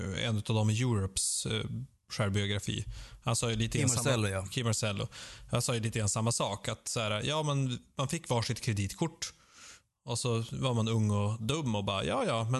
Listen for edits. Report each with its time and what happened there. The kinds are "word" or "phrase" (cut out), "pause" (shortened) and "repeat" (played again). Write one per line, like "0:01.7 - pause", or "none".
none